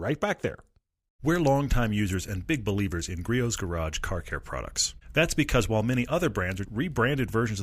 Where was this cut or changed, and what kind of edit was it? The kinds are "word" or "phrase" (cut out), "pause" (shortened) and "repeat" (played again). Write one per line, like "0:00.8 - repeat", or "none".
0:06.6 - word